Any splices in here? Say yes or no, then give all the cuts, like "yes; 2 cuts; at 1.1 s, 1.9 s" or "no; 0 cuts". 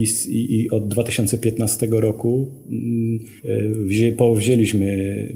yes; 1 cut; at 3.4 s